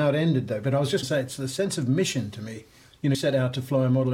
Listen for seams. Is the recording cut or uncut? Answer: cut